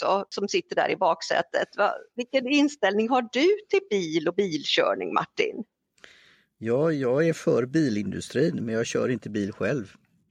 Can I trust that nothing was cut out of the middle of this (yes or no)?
yes